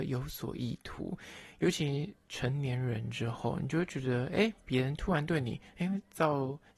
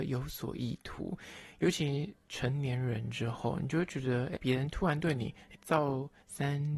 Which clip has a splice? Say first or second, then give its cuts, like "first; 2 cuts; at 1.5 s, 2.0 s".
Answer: second; 2 cuts; at 4.3 s, 5.5 s